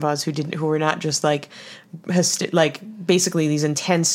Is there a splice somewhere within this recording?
no; 0 cuts

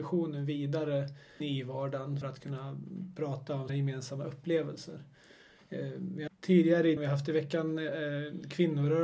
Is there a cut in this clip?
yes; 5 cuts; at 1.4 s, 2.2 s, 3.7 s, 6.3 s, 7.0 s

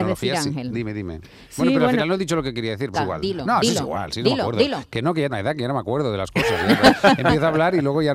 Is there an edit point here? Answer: yes; 2 cuts; at 2.9 s, 5.3 s

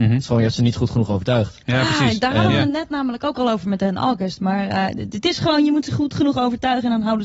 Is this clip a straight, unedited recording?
yes; 0 cuts

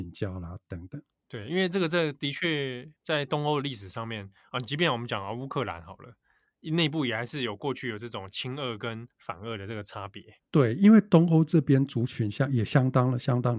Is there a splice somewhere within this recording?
yes; 3 cuts; at 3.0 s, 9.1 s, 10.4 s

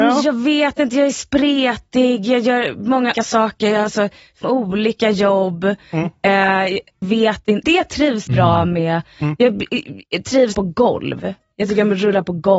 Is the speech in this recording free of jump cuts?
no; 6 cuts; at 3.1 s, 4.4 s, 7.0 s, 7.6 s, 8.3 s, 10.5 s

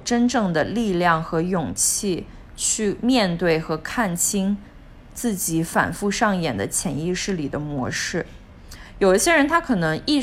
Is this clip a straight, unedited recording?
no; 1 cut; at 2.5 s

